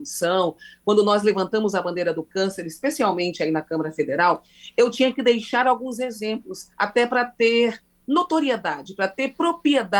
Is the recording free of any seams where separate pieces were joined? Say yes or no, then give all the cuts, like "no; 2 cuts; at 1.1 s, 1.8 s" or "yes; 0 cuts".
no; 1 cut; at 6.7 s